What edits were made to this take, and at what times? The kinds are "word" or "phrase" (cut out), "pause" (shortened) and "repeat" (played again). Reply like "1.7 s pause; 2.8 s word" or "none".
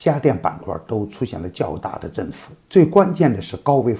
2.6 s pause